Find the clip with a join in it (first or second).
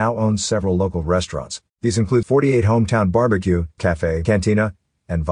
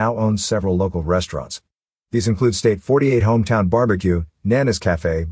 first